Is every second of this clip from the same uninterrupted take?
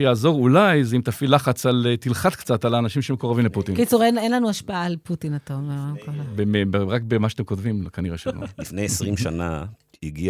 yes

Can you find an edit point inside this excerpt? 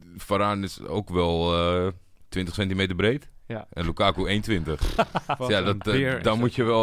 no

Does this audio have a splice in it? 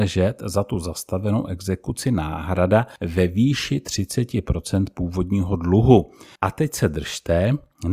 no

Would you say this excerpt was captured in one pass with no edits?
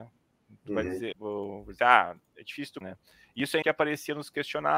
no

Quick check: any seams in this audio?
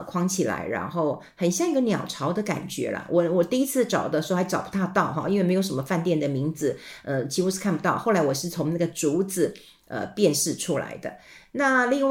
no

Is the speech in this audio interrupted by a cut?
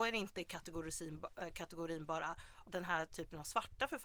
yes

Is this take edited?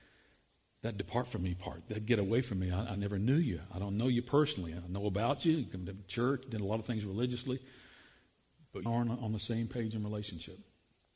yes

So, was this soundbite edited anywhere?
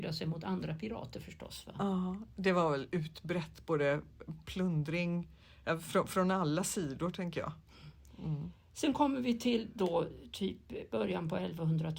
no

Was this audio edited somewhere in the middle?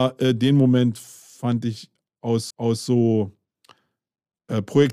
yes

